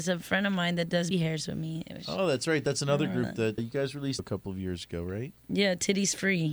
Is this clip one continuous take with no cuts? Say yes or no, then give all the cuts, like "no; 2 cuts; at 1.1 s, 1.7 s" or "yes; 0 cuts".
no; 3 cuts; at 1.1 s, 3.6 s, 4.2 s